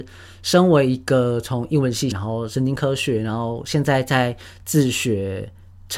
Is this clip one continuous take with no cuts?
no; 1 cut; at 2.1 s

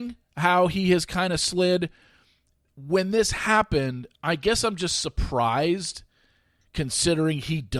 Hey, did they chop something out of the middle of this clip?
no; 0 cuts

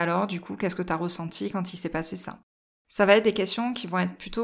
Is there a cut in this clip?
no; 0 cuts

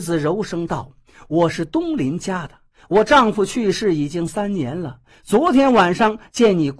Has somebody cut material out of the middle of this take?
no; 0 cuts

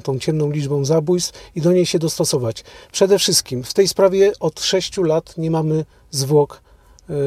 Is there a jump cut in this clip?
no; 0 cuts

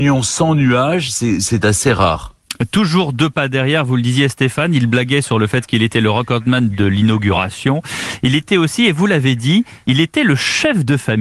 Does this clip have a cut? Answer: yes; 1 cut; at 6.7 s

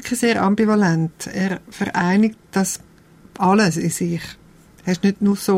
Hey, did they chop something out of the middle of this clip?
no; 0 cuts

